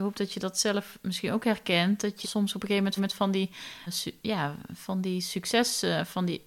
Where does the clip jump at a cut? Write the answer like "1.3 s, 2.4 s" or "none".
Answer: 2.2 s, 3.0 s, 3.9 s